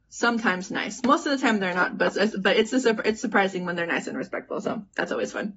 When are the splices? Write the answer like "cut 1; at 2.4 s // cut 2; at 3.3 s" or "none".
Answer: none

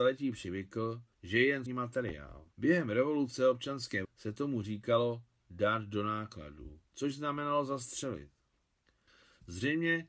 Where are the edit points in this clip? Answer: cut 1; at 1.1 s // cut 2; at 1.7 s // cut 3; at 2.5 s // cut 4; at 4.0 s // cut 5; at 6.9 s

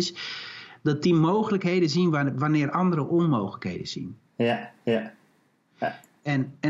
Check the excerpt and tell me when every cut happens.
none

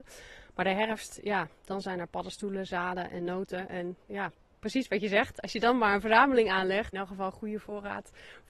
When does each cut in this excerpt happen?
cut 1; at 6.9 s

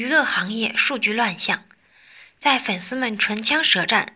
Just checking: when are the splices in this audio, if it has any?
none

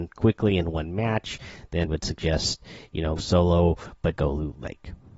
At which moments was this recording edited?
cut 1; at 1.8 s // cut 2; at 3.2 s // cut 3; at 4.2 s

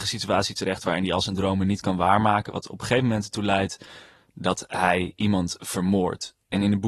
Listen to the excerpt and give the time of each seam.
none

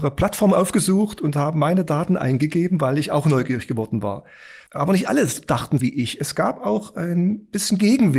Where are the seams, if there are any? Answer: cut 1; at 4.7 s // cut 2; at 5.8 s

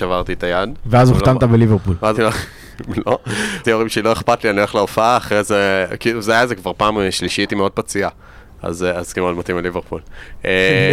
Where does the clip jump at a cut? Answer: cut 1; at 2.1 s // cut 2; at 3.6 s // cut 3; at 7.5 s // cut 4; at 9.1 s

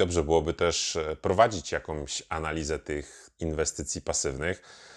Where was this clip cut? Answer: cut 1; at 3.4 s

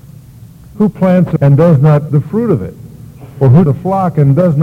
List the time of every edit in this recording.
cut 1; at 1.4 s // cut 2; at 2.1 s // cut 3; at 3.7 s

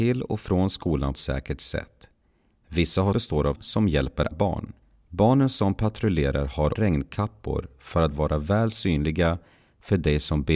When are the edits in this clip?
cut 1; at 1.1 s // cut 2; at 3.1 s // cut 3; at 3.6 s // cut 4; at 4.3 s // cut 5; at 4.8 s // cut 6; at 6.7 s

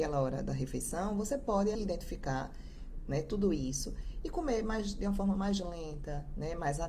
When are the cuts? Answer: cut 1; at 1.7 s

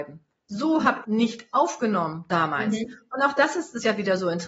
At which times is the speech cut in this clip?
cut 1; at 1.0 s

